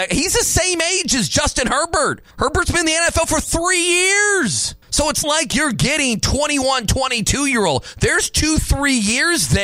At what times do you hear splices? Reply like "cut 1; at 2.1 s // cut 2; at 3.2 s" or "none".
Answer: cut 1; at 2.3 s // cut 2; at 4.8 s // cut 3; at 5.2 s

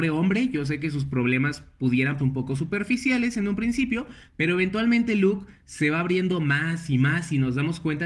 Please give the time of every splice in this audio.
cut 1; at 2.2 s

